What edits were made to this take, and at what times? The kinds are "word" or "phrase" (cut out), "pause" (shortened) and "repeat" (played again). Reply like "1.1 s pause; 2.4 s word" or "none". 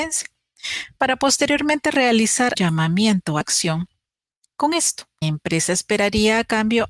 2.5 s word; 3.4 s word; 5.2 s word

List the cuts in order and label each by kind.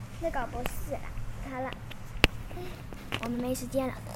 3.2 s phrase

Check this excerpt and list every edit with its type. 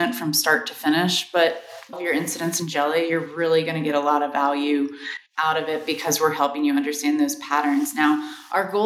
1.9 s phrase

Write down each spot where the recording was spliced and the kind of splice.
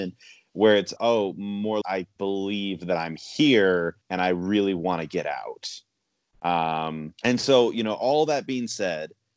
1.0 s word; 1.8 s word; 2.2 s word; 4.0 s pause; 7.2 s pause

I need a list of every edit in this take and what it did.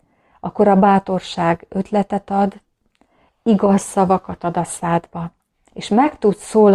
none

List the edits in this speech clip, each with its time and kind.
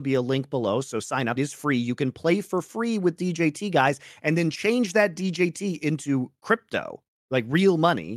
1.4 s word

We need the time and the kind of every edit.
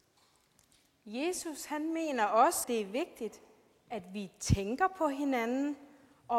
2.6 s word

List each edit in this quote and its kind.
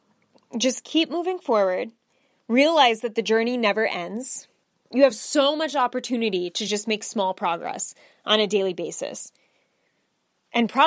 none

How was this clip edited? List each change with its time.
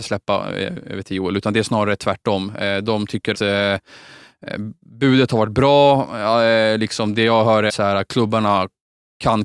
3.3 s word; 7.7 s word

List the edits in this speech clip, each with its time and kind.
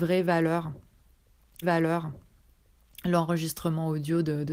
1.6 s repeat

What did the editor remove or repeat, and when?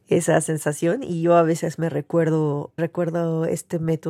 2.8 s word

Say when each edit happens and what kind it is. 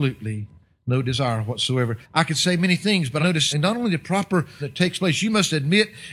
2.0 s pause; 3.2 s phrase; 3.5 s word; 4.6 s word

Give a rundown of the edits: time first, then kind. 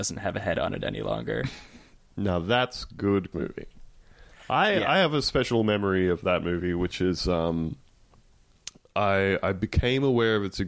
3.3 s word

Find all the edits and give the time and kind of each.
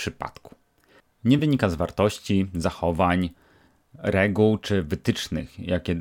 none

